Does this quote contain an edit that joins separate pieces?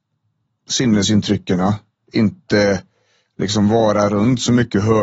no; 0 cuts

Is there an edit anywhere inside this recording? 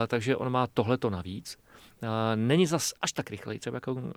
yes; 1 cut; at 3.0 s

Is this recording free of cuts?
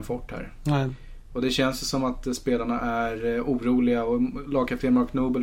yes; 0 cuts

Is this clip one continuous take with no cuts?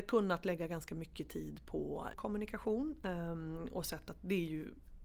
no; 1 cut; at 2.1 s

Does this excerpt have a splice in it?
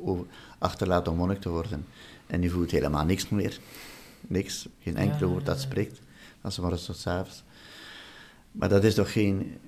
yes; 1 cut; at 4.7 s

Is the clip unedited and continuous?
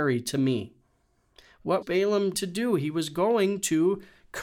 no; 2 cuts; at 1.8 s, 2.3 s

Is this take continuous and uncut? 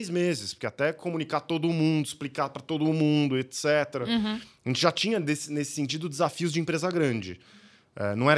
yes; 0 cuts

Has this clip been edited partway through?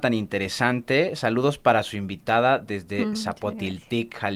no; 0 cuts

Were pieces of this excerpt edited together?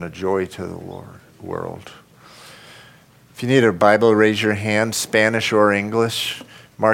no; 0 cuts

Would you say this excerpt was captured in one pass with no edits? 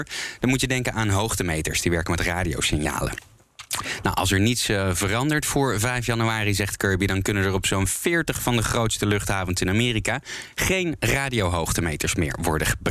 yes; 0 cuts

